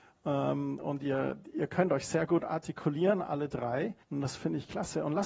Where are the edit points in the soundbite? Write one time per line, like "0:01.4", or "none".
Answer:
0:04.0

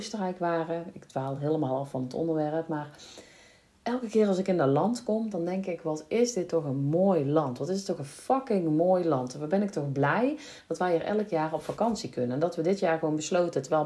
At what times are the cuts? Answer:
none

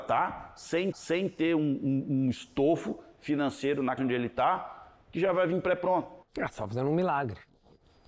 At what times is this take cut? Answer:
0:00.9
0:04.0
0:05.0
0:06.2

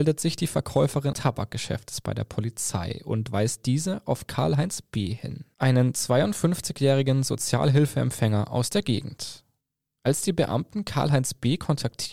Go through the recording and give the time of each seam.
0:01.1

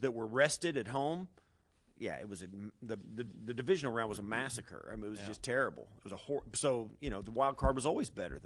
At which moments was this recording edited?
0:03.3

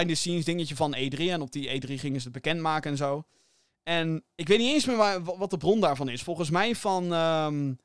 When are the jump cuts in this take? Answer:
none

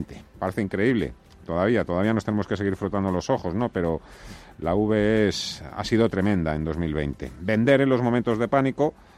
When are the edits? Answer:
none

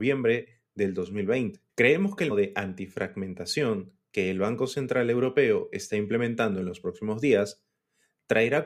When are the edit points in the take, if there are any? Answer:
0:01.7
0:02.3

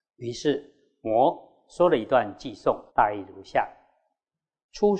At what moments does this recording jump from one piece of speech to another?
0:02.9

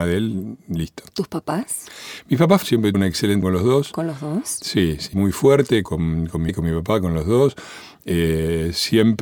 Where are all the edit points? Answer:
0:02.6
0:02.9
0:03.4
0:05.1
0:05.8
0:06.5

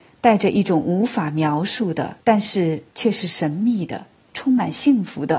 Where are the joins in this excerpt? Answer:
0:02.2
0:02.9

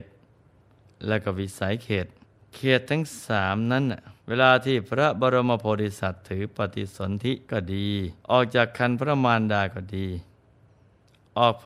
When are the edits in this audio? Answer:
0:02.2
0:04.2
0:07.4
0:08.2

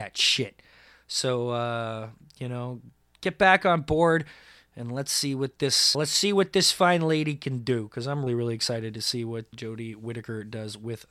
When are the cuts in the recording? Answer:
0:05.9
0:08.3
0:09.5

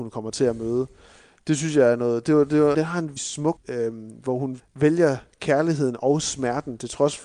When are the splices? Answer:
0:02.7
0:03.2
0:03.6
0:04.6

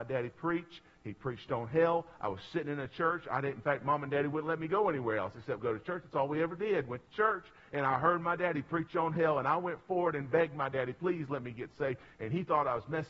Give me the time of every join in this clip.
none

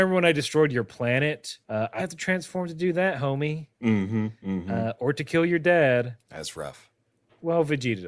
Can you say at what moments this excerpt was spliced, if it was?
0:01.6
0:02.0
0:06.2

